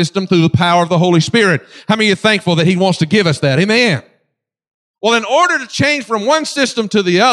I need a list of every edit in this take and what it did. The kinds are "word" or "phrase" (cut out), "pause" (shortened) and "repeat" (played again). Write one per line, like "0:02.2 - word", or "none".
none